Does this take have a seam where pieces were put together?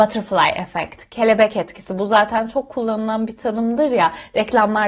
no; 0 cuts

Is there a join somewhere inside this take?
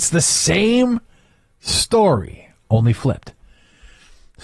no; 0 cuts

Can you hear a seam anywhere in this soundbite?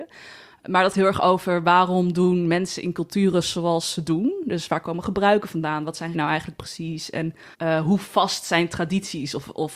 yes; 3 cuts; at 0.9 s, 6.1 s, 7.5 s

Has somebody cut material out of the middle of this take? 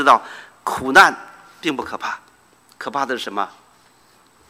no; 0 cuts

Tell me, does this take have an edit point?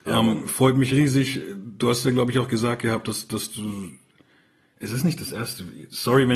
no; 0 cuts

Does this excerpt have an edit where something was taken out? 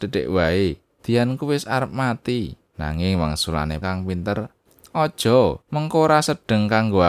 yes; 3 cuts; at 2.7 s, 3.8 s, 5.6 s

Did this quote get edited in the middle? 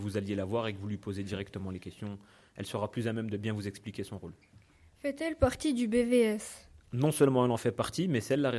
no; 0 cuts

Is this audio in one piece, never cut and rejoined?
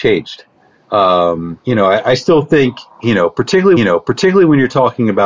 no; 2 cuts; at 1.6 s, 3.8 s

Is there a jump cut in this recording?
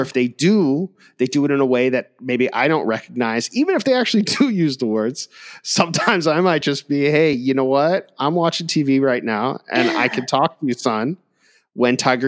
no; 0 cuts

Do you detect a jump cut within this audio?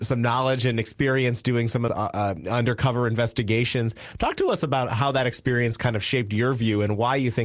yes; 1 cut; at 1.9 s

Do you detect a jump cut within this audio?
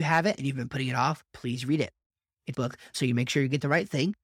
yes; 3 cuts; at 1.3 s, 2.5 s, 2.9 s

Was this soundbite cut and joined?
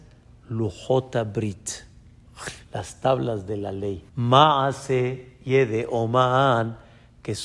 yes; 2 cuts; at 2.6 s, 4.1 s

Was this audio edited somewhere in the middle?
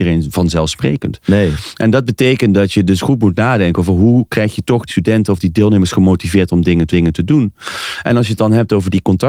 yes; 2 cuts; at 4.9 s, 6.9 s

